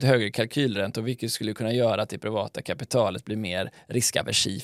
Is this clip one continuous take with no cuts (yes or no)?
yes